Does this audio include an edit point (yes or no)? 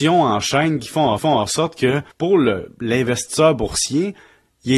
yes